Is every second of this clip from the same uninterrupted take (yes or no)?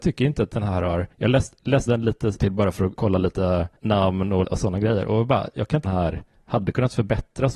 no